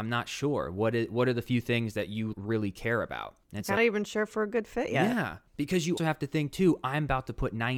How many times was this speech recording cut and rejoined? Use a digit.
5